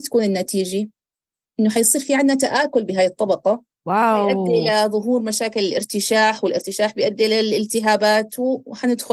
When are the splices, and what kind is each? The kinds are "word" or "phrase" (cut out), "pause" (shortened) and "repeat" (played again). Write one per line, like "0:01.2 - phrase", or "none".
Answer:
none